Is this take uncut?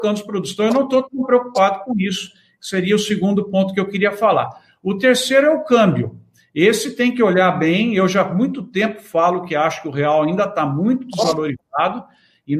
yes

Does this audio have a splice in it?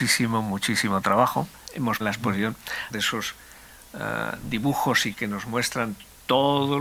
yes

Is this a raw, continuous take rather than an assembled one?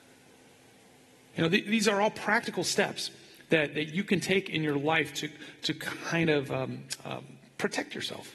yes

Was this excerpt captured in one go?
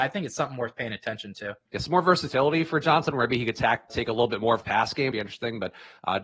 no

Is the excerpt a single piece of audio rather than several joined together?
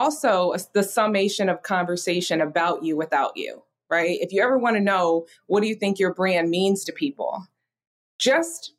yes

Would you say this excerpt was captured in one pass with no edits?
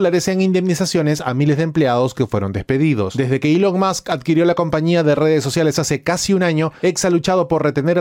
yes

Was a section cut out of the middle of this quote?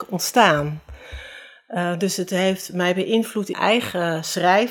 yes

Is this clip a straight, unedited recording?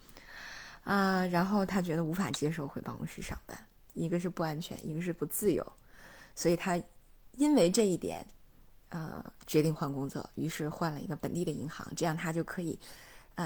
yes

